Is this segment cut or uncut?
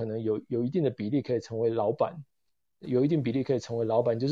uncut